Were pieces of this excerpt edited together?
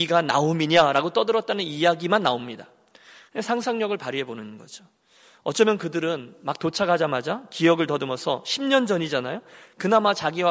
no; 0 cuts

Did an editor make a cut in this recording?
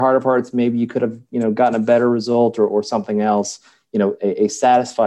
no; 0 cuts

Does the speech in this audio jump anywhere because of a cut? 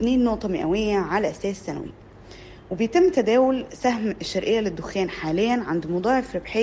no; 0 cuts

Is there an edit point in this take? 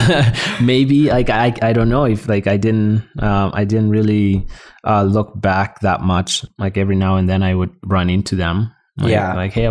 no; 0 cuts

